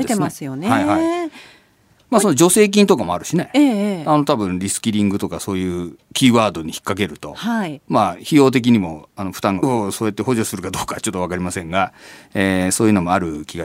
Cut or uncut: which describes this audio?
cut